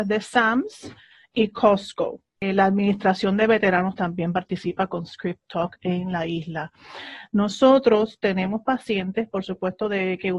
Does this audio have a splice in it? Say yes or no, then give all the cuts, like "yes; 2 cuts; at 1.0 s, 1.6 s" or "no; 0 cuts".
no; 0 cuts